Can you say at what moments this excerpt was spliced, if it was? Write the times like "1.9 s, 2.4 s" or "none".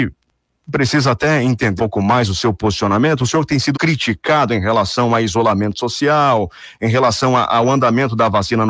1.8 s, 3.7 s